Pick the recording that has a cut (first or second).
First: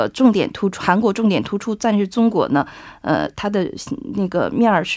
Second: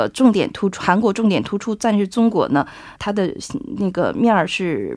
second